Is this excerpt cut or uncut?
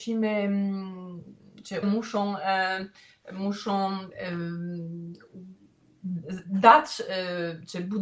cut